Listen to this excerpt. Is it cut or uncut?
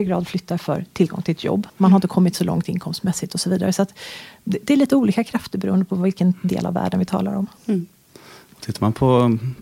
cut